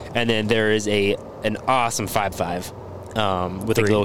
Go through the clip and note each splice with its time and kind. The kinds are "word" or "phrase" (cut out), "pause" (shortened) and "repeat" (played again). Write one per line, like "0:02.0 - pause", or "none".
0:01.6 - word
0:02.3 - word